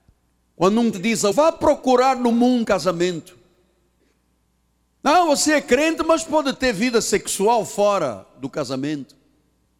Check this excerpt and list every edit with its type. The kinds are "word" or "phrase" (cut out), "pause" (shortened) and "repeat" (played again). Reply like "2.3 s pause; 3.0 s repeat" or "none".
0.9 s word; 1.3 s word; 2.6 s word

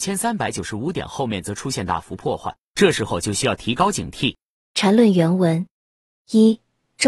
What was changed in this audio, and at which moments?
none

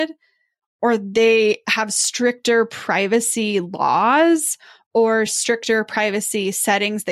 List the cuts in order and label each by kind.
none

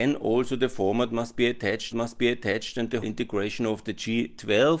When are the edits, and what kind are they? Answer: 1.9 s repeat; 3.0 s word

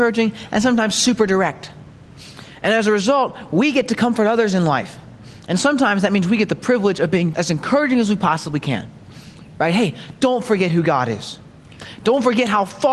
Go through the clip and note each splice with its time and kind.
7.3 s word

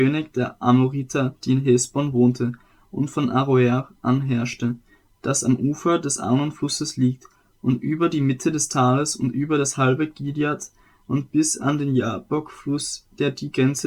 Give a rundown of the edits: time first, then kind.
none

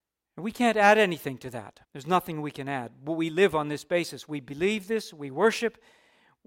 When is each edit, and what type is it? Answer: 1.8 s pause

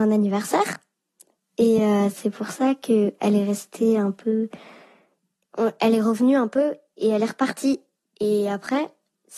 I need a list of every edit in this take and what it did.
none

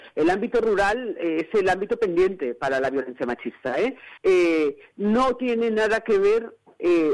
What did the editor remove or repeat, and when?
4.2 s pause

